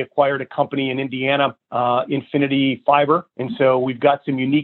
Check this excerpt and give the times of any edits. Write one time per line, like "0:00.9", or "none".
0:01.6
0:03.3